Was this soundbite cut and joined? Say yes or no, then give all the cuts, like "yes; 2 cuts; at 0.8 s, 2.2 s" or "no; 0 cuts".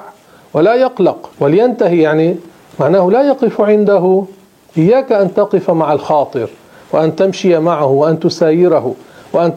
yes; 1 cut; at 1.3 s